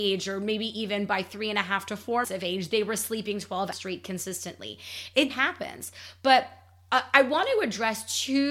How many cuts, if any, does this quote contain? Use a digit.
3